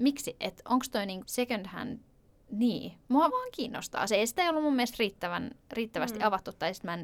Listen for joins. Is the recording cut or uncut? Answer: cut